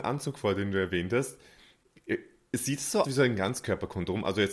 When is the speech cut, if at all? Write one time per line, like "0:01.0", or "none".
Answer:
0:03.0